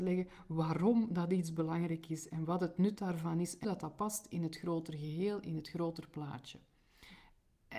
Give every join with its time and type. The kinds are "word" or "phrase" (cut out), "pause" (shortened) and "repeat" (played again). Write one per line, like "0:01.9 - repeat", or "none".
0:03.6 - word